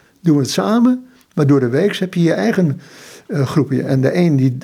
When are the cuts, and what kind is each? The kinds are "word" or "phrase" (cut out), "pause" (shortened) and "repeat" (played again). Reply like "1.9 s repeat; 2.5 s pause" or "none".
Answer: none